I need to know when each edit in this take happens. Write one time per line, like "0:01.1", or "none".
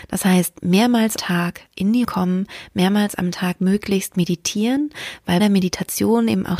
0:01.2
0:02.0
0:05.4